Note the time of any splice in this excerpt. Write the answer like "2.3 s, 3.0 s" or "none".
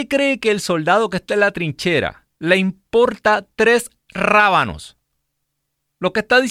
2.3 s